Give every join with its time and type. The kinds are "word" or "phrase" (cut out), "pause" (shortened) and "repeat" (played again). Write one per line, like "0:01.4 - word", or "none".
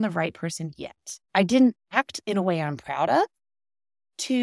0:01.2 - pause